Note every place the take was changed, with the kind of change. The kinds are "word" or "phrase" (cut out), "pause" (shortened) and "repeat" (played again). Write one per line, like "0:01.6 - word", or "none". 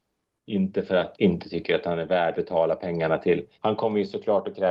0:01.1 - word
0:02.3 - word
0:03.5 - pause